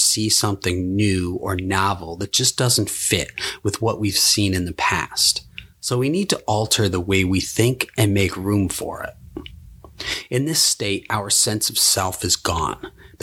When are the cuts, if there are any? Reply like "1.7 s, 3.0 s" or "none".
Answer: none